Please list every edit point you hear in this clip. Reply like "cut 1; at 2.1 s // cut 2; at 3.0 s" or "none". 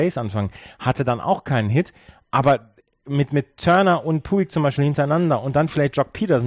cut 1; at 2.8 s

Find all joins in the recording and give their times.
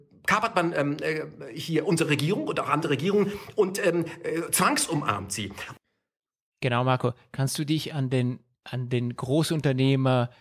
none

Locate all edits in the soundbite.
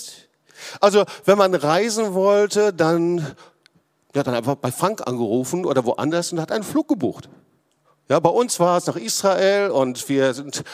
cut 1; at 4.2 s // cut 2; at 7.8 s

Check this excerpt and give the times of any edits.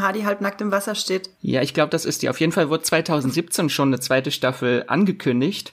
cut 1; at 1.3 s

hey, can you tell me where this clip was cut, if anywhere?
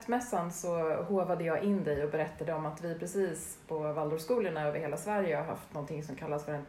none

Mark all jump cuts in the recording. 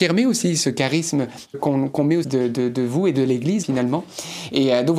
cut 1; at 1.5 s // cut 2; at 2.2 s // cut 3; at 3.6 s

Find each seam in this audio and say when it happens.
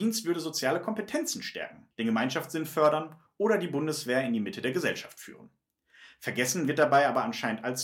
cut 1; at 1.9 s

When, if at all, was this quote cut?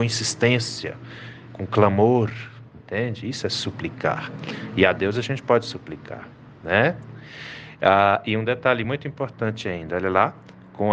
none

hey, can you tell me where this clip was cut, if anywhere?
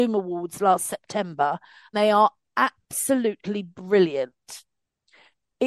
cut 1; at 1.9 s

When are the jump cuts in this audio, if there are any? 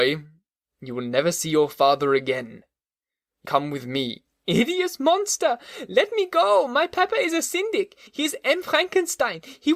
cut 1; at 3.4 s // cut 2; at 8.1 s

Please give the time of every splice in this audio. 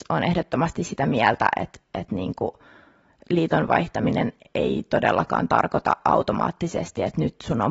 none

